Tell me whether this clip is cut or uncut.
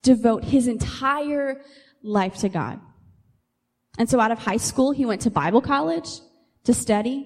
uncut